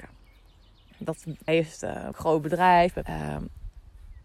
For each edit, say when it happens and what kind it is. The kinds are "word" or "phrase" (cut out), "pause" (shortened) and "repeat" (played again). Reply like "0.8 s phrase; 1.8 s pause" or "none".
1.5 s word; 2.1 s word; 3.0 s word